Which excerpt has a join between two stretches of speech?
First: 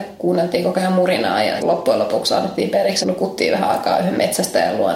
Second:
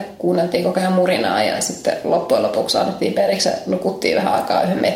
first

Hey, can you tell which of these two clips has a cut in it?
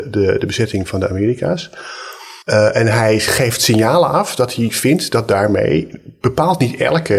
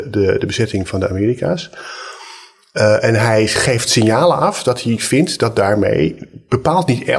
first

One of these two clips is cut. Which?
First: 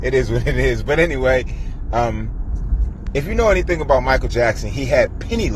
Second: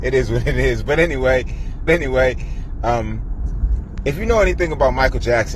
second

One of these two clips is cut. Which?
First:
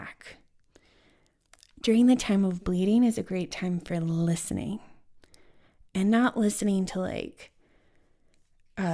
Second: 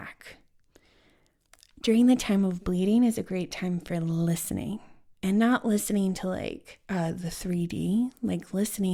second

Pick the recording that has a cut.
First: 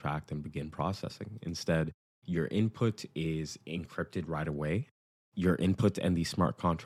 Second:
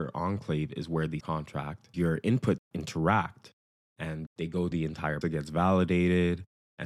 second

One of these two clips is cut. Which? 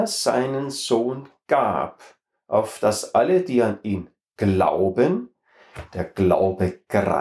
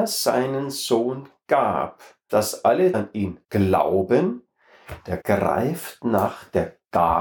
second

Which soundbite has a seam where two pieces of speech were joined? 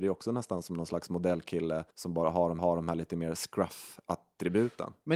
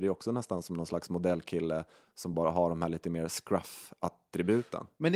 first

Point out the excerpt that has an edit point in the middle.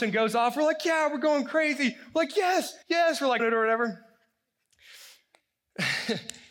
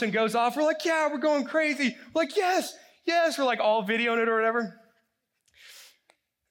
first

